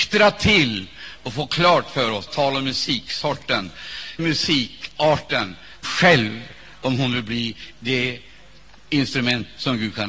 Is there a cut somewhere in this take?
yes; 3 cuts; at 2.3 s, 4.2 s, 5.8 s

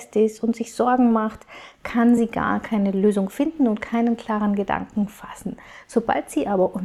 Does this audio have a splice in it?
no; 0 cuts

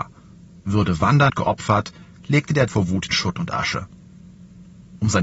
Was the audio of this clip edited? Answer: yes; 3 cuts; at 1.3 s, 2.7 s, 3.1 s

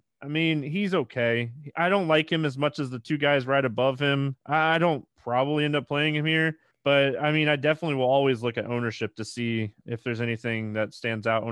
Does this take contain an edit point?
yes; 3 cuts; at 4.4 s, 5.1 s, 6.7 s

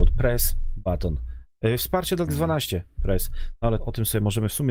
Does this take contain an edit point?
yes; 2 cuts; at 2.3 s, 3.8 s

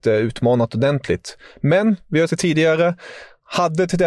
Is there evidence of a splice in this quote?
yes; 1 cut; at 2.3 s

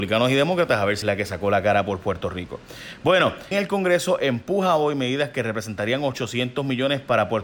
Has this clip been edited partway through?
yes; 2 cuts; at 1.0 s, 3.5 s

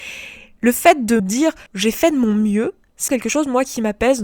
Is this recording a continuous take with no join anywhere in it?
no; 3 cuts; at 1.2 s, 1.7 s, 3.1 s

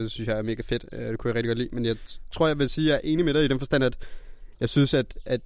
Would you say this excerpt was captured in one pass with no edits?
yes; 0 cuts

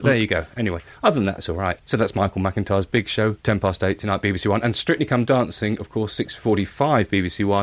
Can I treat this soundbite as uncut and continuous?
no; 1 cut; at 3.4 s

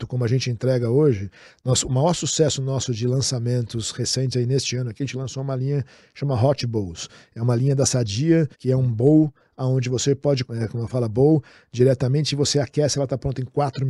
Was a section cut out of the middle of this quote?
yes; 2 cuts; at 8.5 s, 10.4 s

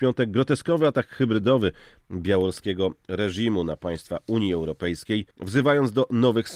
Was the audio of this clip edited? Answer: yes; 1 cut; at 5.3 s

